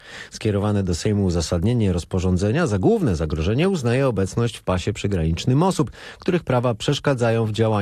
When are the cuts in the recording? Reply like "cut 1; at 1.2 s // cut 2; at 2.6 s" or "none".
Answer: none